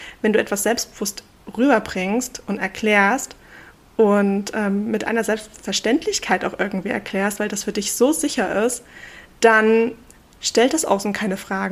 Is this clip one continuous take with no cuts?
yes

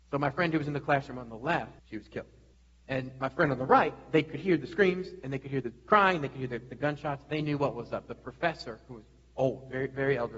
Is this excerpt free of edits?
no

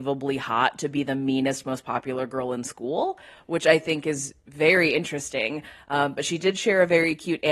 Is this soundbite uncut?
yes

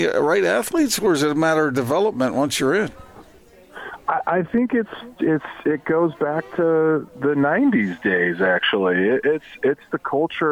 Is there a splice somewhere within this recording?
no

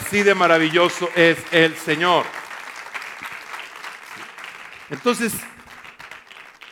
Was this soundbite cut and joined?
no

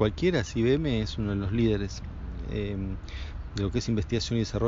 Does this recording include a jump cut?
no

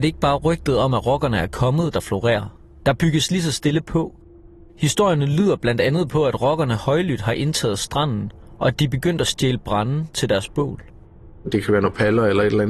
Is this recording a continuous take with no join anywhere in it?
yes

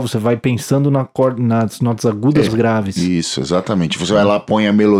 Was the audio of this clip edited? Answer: yes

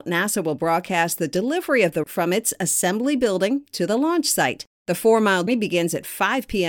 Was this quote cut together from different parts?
yes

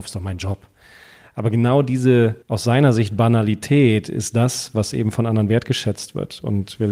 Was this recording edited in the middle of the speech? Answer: yes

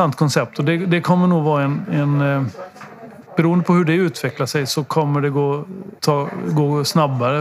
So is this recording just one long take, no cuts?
no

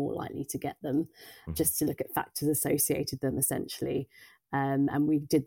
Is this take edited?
yes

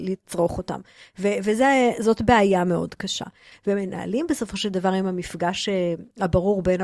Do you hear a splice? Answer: no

